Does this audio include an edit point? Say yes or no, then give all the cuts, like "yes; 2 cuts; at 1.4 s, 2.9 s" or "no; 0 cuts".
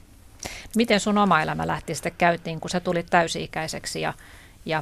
no; 0 cuts